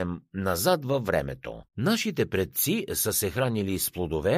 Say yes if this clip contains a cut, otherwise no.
yes